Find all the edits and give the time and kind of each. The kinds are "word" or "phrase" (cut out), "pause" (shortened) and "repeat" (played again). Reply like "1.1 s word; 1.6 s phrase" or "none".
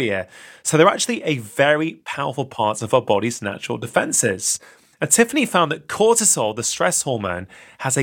none